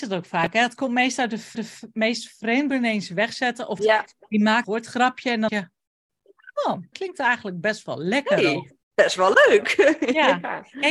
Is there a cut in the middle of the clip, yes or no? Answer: yes